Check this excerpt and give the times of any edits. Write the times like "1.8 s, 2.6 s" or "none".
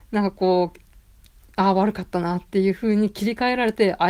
none

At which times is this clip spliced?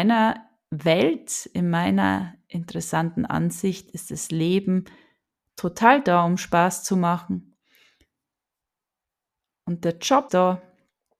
10.3 s

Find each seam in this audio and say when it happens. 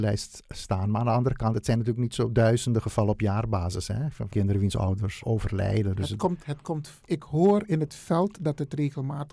4.3 s, 5.2 s, 7.1 s

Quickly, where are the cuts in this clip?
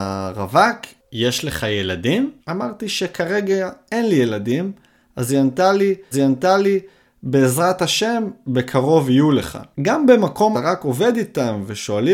2.4 s, 6.1 s, 9.7 s, 10.5 s

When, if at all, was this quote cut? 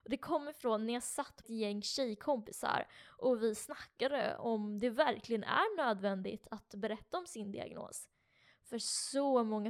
1.4 s

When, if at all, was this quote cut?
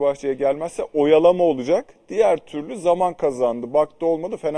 none

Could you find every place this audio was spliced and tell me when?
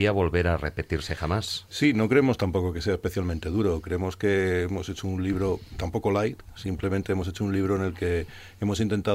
none

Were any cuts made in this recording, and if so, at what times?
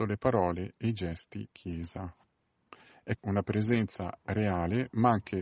1.5 s, 3.2 s

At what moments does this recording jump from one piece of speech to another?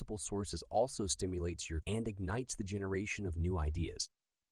1.8 s

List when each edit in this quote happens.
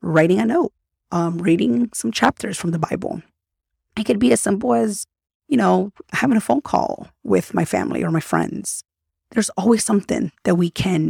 none

